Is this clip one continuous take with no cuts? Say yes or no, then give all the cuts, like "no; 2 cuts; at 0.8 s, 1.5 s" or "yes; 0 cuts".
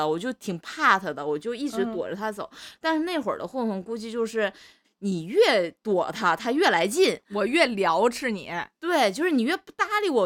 yes; 0 cuts